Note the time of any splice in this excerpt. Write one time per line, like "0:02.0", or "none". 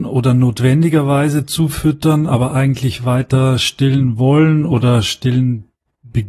none